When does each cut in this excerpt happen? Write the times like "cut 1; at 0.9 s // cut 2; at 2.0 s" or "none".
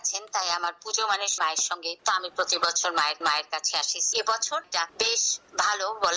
cut 1; at 1.4 s // cut 2; at 2.0 s // cut 3; at 3.2 s // cut 4; at 4.1 s // cut 5; at 4.6 s

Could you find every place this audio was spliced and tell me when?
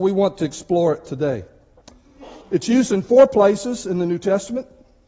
cut 1; at 2.4 s

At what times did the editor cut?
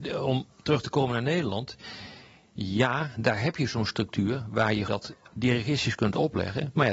cut 1; at 4.9 s

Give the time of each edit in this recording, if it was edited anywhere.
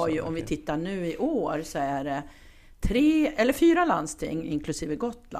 none

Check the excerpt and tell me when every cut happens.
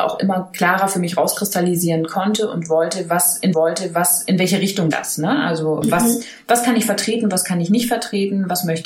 cut 1; at 3.5 s // cut 2; at 4.9 s // cut 3; at 5.8 s

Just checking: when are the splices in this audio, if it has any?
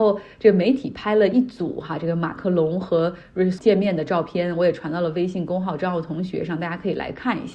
cut 1; at 3.6 s

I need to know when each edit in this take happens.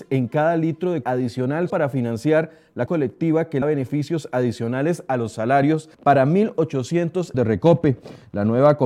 cut 1; at 1.0 s // cut 2; at 1.7 s // cut 3; at 2.9 s // cut 4; at 3.6 s // cut 5; at 5.9 s // cut 6; at 7.3 s

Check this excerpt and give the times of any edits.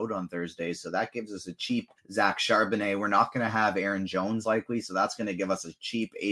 cut 1; at 2.0 s // cut 2; at 4.4 s

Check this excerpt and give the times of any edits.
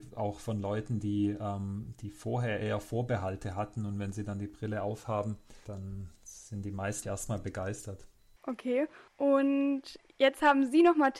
cut 1; at 7.0 s // cut 2; at 9.1 s

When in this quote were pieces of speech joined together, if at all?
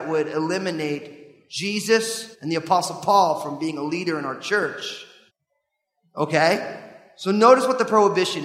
cut 1; at 2.3 s // cut 2; at 5.3 s

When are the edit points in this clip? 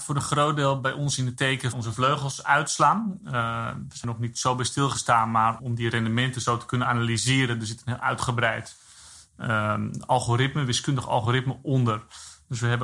cut 1; at 1.7 s // cut 2; at 4.0 s // cut 3; at 5.6 s

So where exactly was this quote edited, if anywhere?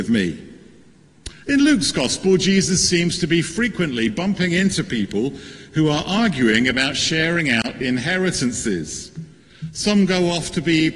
none

